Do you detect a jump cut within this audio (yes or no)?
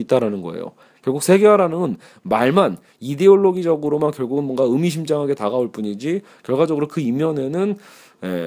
no